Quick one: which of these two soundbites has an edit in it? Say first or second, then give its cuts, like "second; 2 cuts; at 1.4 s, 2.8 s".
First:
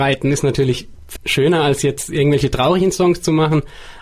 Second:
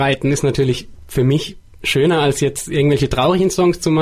first; 1 cut; at 1.2 s